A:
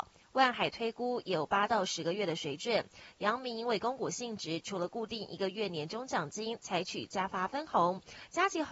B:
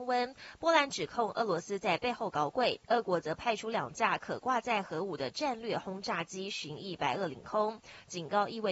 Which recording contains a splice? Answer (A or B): B